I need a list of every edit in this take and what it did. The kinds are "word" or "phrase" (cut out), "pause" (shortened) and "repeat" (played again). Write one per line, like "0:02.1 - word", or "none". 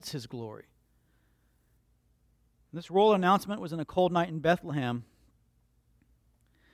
none

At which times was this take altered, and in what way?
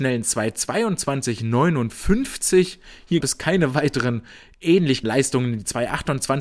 0:03.2 - word
0:05.0 - word

